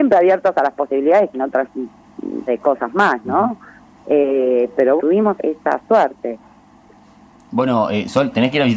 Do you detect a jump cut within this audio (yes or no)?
yes